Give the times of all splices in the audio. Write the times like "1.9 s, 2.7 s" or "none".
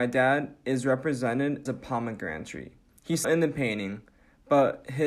1.7 s, 3.2 s

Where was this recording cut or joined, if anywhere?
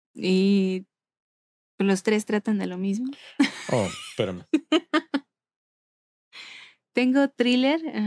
none

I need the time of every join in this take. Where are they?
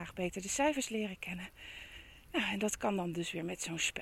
none

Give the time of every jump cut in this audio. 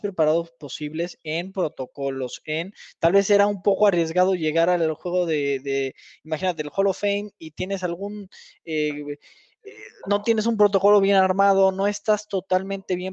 none

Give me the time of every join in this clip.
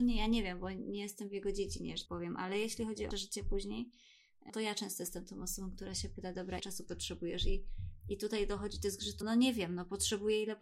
2.1 s, 3.1 s, 4.5 s, 6.6 s, 9.2 s

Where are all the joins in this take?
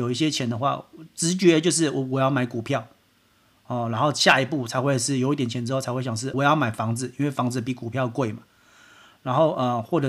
6.3 s

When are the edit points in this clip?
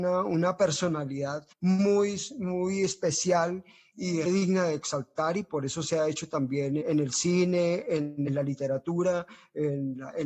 1.5 s, 4.3 s, 6.8 s, 8.3 s

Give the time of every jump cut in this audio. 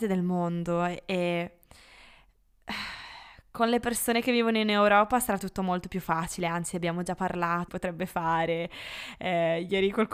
7.7 s

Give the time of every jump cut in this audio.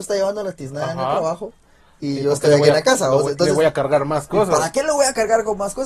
none

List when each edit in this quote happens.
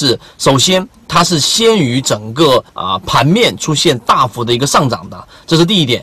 2.7 s

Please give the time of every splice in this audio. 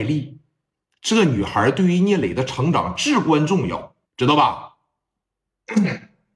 4.0 s

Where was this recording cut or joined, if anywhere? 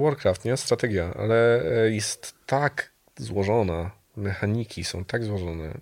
none

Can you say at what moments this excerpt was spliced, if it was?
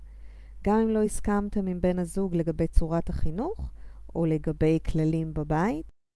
none

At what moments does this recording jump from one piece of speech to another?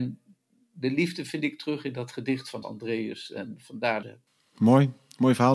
2.6 s, 4.0 s

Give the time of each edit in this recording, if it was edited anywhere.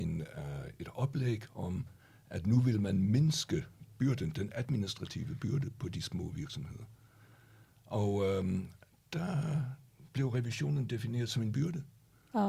4.0 s

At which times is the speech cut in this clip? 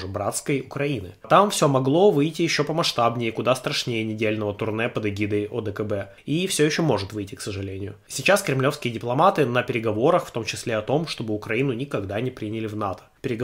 none

